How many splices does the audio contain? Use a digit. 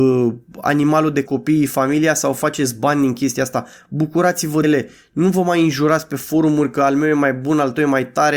2